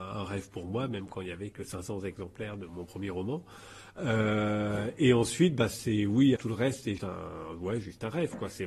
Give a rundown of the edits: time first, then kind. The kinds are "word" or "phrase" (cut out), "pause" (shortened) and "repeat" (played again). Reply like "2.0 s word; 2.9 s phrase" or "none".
1.5 s word; 2.7 s word; 6.4 s word; 7.0 s word